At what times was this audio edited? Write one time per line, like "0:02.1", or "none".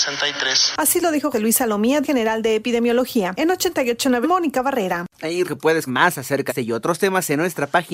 0:01.3
0:02.0
0:04.2
0:05.5
0:05.9
0:06.5